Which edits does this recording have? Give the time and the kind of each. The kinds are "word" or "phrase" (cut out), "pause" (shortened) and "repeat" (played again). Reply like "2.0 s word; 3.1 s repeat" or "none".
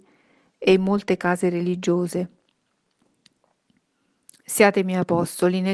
none